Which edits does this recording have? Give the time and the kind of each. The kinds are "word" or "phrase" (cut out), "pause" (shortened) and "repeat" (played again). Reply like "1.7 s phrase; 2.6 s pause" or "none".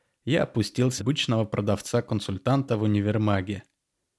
1.0 s word